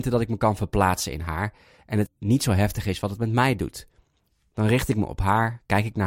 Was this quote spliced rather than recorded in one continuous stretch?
yes; 1 cut; at 2.1 s

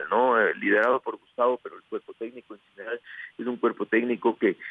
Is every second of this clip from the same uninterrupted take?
yes; 0 cuts

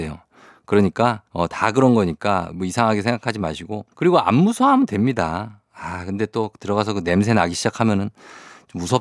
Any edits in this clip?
yes; 2 cuts; at 1.3 s, 3.9 s

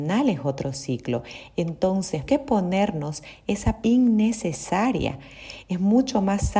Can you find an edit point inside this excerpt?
yes; 2 cuts; at 2.3 s, 3.8 s

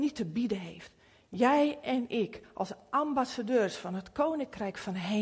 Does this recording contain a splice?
no; 0 cuts

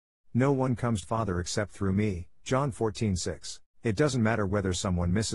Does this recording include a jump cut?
yes; 2 cuts; at 1.0 s, 3.7 s

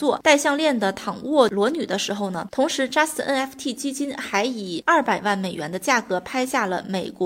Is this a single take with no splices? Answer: yes; 0 cuts

